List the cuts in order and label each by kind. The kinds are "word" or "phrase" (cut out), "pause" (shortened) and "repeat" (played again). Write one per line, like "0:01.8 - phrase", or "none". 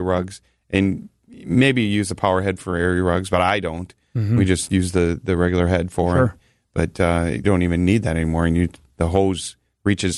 0:07.4 - word